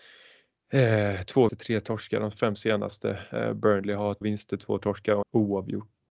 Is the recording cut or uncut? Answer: cut